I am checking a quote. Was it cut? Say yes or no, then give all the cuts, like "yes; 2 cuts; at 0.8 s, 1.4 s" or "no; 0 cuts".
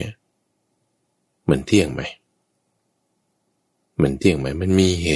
no; 0 cuts